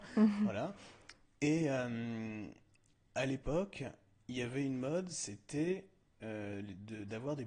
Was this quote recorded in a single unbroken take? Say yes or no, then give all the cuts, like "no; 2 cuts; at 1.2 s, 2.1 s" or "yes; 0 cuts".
yes; 0 cuts